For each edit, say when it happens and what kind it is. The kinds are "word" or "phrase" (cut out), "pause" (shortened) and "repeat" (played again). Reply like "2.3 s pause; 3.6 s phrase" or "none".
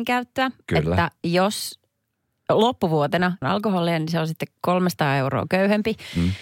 3.4 s phrase

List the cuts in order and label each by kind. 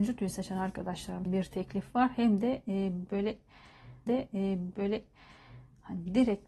1.3 s word; 4.1 s repeat

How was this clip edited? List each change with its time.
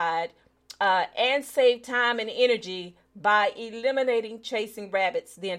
none

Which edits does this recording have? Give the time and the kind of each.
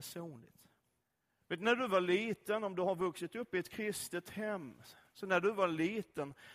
1.0 s pause

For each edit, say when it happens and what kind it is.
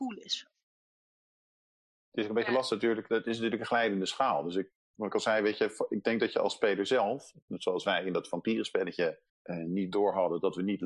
9.3 s pause

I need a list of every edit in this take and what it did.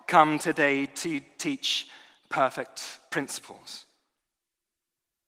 none

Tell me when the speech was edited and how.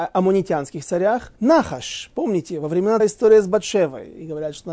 1.4 s pause; 3.0 s phrase

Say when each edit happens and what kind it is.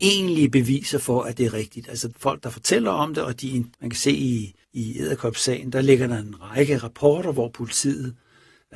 2.1 s word; 3.7 s pause; 4.6 s pause

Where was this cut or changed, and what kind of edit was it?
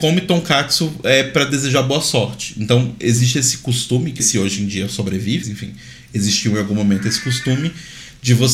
4.2 s phrase; 5.4 s word

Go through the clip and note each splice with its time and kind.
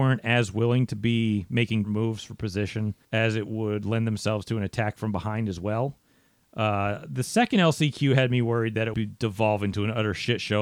1.8 s word; 3.0 s pause; 8.9 s word

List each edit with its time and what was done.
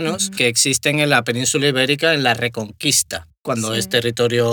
3.4 s pause

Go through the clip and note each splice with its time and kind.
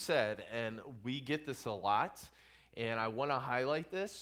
none

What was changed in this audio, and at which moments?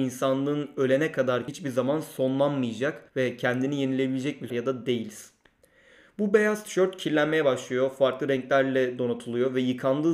1.5 s word; 3.1 s pause; 4.5 s phrase

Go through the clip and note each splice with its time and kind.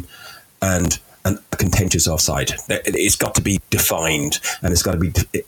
none

